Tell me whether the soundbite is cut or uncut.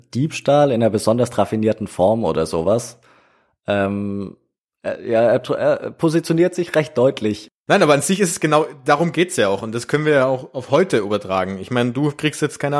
uncut